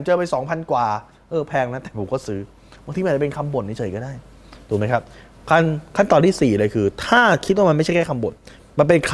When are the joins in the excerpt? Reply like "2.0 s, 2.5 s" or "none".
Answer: none